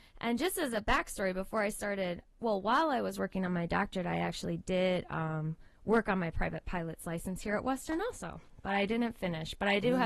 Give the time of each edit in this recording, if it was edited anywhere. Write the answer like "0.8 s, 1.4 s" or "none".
none